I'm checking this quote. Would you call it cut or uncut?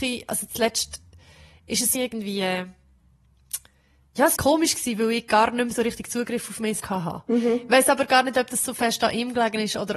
cut